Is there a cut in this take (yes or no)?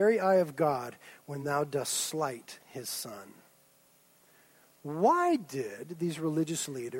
no